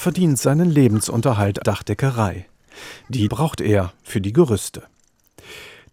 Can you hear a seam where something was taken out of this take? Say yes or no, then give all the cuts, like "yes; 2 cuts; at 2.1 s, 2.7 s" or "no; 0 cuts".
yes; 2 cuts; at 1.6 s, 3.3 s